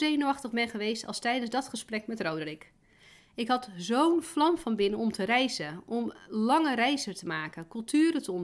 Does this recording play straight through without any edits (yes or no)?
yes